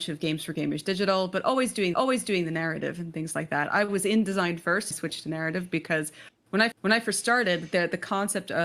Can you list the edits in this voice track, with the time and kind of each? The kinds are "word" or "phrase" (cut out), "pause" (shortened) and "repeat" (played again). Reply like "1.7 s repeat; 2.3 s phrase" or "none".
1.9 s repeat; 4.9 s phrase; 6.7 s repeat